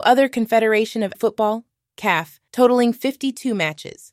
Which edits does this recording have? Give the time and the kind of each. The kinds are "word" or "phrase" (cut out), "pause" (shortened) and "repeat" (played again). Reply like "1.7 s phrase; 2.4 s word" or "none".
1.1 s word; 2.5 s word